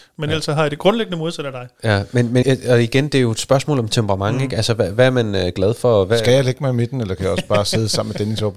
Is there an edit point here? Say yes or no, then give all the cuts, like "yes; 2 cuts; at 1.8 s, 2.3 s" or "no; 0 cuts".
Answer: yes; 1 cut; at 2.4 s